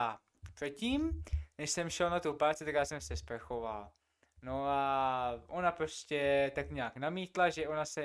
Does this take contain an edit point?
no; 0 cuts

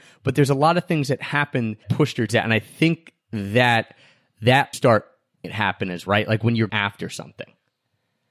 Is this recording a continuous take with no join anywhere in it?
no; 7 cuts; at 1.8 s, 2.3 s, 3.2 s, 4.7 s, 5.4 s, 6.1 s, 6.7 s

